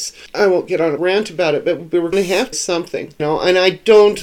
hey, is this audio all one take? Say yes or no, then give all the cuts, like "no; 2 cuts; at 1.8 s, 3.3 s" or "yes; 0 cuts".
no; 5 cuts; at 1.0 s, 1.8 s, 2.1 s, 2.5 s, 3.2 s